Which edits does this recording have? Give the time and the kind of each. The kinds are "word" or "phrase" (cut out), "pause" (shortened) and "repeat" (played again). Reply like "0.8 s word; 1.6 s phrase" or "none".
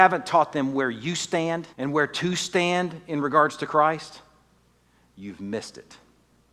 1.7 s pause